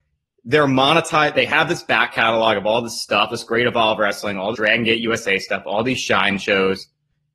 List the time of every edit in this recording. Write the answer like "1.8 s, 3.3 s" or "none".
3.3 s, 4.5 s